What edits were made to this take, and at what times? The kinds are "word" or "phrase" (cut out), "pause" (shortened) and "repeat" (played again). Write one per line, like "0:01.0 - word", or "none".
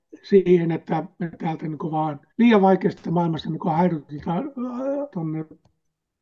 0:01.1 - pause
0:02.3 - pause
0:05.1 - word